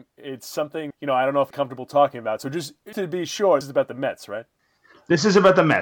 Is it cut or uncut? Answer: cut